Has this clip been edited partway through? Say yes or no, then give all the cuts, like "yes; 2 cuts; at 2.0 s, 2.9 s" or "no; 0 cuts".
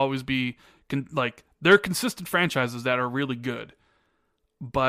no; 0 cuts